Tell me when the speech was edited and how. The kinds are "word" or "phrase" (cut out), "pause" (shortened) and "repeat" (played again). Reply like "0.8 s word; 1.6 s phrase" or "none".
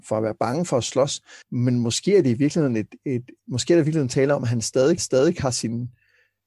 1.4 s pause; 3.4 s pause; 5.0 s repeat